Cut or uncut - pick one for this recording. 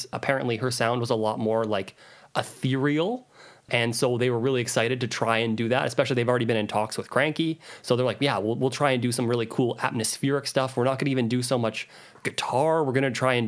uncut